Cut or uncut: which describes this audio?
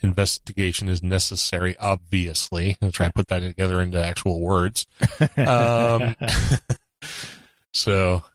uncut